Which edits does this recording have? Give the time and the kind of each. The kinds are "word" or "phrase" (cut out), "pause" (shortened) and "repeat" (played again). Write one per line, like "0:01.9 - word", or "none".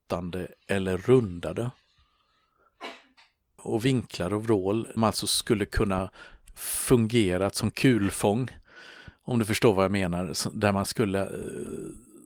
0:03.6 - phrase
0:05.0 - phrase